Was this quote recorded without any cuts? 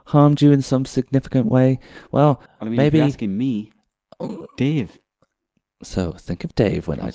no; 1 cut; at 2.5 s

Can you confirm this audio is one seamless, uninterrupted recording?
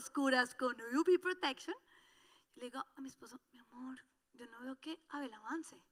yes; 0 cuts

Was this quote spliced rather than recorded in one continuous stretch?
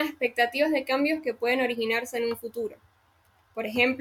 no; 0 cuts

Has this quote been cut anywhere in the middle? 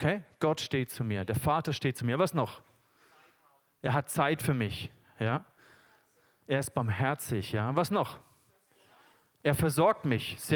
no; 0 cuts

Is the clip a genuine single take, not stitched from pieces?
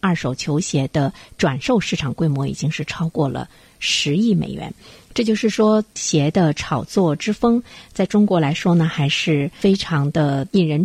yes; 0 cuts

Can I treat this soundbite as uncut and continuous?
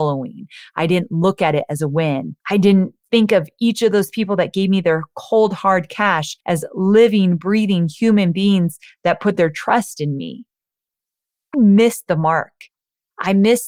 no; 3 cuts; at 2.4 s, 6.4 s, 11.5 s

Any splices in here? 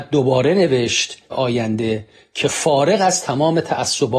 yes; 1 cut; at 1.3 s

